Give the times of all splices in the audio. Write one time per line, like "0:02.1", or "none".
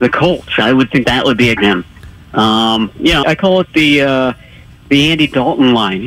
0:01.0
0:01.6
0:03.2